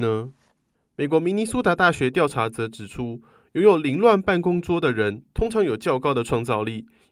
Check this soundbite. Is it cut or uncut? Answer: uncut